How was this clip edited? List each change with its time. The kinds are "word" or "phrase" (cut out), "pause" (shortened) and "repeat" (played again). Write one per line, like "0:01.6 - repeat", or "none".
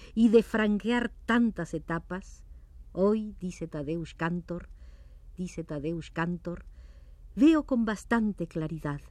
0:05.4 - repeat